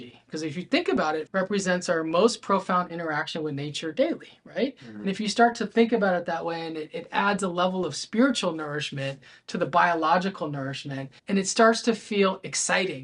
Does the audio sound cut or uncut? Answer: cut